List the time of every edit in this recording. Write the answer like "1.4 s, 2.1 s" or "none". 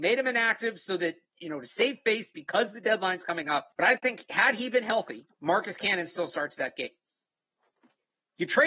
3.7 s, 5.3 s

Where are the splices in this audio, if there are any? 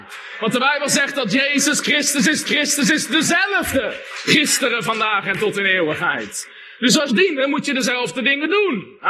2.4 s, 7.1 s

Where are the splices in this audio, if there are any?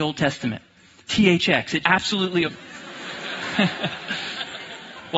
1.1 s, 1.8 s, 2.4 s

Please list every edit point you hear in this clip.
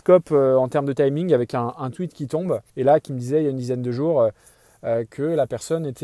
2.7 s

